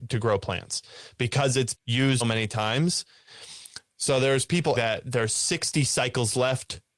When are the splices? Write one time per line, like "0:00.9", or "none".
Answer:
0:01.7
0:02.2
0:04.8